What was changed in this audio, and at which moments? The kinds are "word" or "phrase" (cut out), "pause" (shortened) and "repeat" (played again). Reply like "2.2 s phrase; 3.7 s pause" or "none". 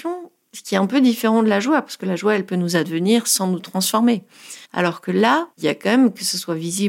4.6 s pause; 5.5 s pause